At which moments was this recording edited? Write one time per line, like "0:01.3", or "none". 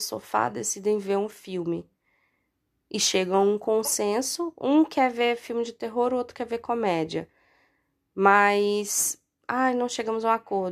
none